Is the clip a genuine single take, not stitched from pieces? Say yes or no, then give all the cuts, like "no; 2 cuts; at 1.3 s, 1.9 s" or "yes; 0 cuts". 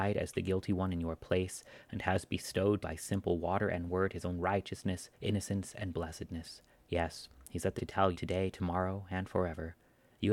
no; 5 cuts; at 2.8 s, 5.1 s, 6.7 s, 7.8 s, 8.1 s